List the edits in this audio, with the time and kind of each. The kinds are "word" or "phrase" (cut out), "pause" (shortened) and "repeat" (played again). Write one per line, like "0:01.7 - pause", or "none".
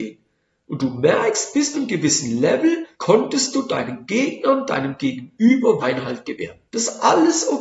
0:01.7 - word
0:02.9 - pause
0:05.8 - word
0:06.7 - pause